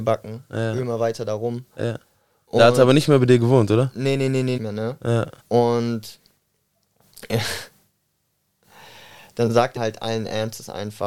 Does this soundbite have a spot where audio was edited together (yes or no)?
yes